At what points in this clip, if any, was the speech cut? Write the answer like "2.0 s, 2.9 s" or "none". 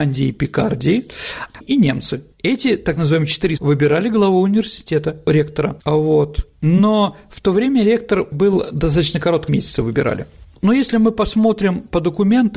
1.6 s, 2.3 s, 3.6 s, 9.5 s